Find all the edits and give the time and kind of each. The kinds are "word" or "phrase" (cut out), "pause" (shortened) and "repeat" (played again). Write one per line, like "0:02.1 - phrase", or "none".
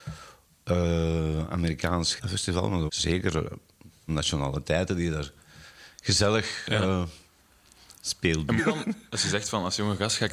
0:02.2 - word
0:02.9 - word
0:04.1 - word
0:08.6 - word